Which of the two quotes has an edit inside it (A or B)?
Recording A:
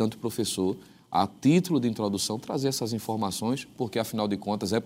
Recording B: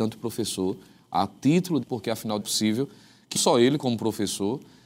B